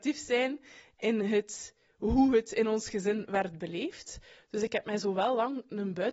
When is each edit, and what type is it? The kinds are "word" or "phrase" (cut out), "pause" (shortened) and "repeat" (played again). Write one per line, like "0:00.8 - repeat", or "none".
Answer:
none